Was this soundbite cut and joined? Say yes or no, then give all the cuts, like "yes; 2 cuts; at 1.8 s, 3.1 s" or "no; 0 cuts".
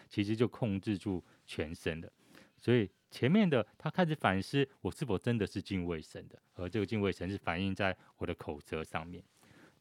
yes; 1 cut; at 6.5 s